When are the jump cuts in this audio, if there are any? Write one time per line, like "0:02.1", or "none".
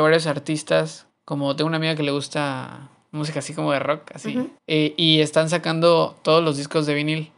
0:01.1
0:04.6